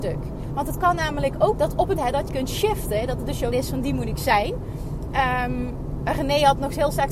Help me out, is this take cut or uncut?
cut